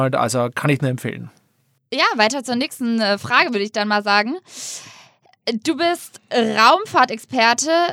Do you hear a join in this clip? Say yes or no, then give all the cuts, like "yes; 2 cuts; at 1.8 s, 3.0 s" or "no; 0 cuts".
no; 0 cuts